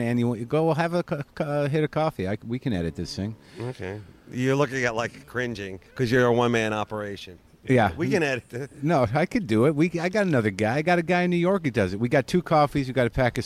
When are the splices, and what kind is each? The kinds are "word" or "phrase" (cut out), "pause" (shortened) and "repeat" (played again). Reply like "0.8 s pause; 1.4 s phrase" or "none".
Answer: 5.9 s pause